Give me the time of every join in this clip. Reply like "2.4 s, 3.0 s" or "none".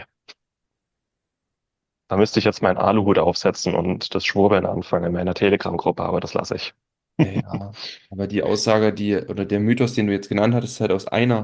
none